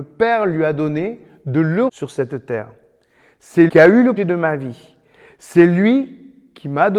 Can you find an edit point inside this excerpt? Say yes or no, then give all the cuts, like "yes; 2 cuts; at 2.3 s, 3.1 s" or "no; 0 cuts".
yes; 3 cuts; at 1.9 s, 3.7 s, 4.2 s